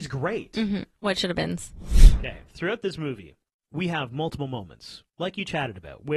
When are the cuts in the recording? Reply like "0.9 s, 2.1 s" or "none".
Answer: 2.5 s